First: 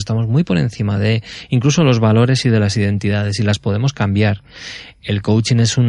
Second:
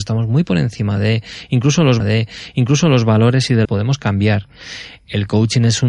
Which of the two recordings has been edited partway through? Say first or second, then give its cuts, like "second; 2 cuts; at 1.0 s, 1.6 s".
second; 2 cuts; at 2.0 s, 3.6 s